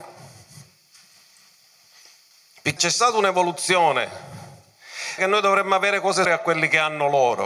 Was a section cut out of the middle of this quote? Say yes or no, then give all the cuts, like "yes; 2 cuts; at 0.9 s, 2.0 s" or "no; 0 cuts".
yes; 3 cuts; at 2.8 s, 5.2 s, 6.2 s